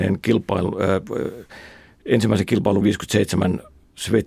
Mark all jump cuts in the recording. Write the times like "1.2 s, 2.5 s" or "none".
2.8 s